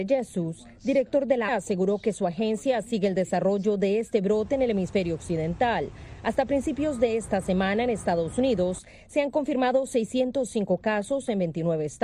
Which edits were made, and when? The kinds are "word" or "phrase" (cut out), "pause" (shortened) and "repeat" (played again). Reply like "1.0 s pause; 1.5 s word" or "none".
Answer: 1.5 s word